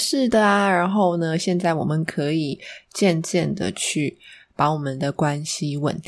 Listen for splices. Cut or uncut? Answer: uncut